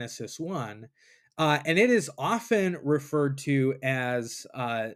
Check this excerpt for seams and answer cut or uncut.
uncut